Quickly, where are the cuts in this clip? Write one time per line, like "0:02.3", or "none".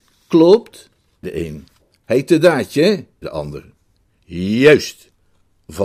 0:01.2
0:03.2